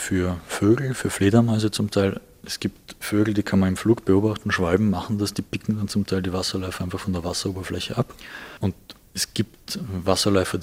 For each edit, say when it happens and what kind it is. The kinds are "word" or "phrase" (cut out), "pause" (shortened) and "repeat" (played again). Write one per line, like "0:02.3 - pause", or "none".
none